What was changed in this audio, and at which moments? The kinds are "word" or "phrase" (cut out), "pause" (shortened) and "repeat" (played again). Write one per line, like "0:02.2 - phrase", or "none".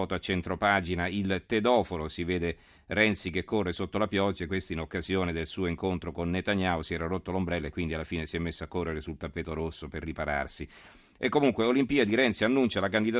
none